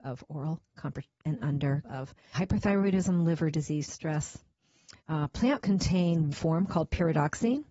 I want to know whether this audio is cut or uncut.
cut